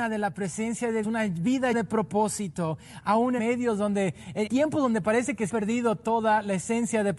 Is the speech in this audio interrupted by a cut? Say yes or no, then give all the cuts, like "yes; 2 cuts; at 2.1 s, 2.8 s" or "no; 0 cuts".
yes; 5 cuts; at 1.0 s, 1.7 s, 3.4 s, 4.5 s, 5.5 s